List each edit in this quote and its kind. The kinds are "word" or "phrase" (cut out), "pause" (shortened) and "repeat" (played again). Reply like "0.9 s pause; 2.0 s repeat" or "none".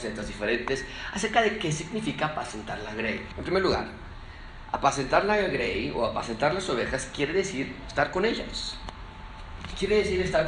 none